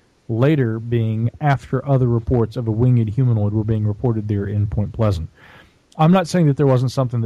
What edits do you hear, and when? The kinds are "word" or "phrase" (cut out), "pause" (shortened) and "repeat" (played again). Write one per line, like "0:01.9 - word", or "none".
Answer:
none